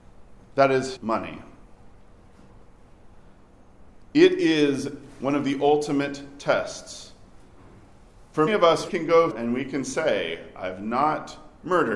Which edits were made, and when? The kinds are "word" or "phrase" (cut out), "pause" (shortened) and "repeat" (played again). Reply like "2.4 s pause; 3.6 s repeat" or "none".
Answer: 1.0 s word; 8.5 s word; 8.9 s word; 9.3 s word